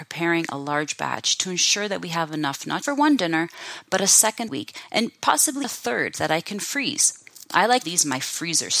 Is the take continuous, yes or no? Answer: no